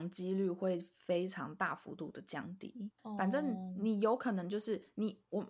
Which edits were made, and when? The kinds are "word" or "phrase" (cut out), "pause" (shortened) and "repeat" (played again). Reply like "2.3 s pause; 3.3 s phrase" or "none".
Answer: 3.0 s pause